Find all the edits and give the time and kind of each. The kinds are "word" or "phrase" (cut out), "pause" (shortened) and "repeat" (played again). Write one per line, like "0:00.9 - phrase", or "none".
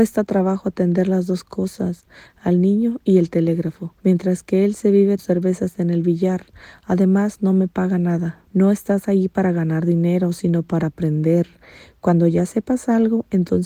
0:04.0 - pause
0:05.2 - word
0:08.4 - pause